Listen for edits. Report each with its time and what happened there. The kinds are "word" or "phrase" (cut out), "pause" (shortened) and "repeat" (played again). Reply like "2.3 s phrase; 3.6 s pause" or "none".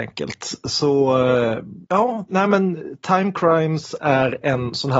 1.8 s pause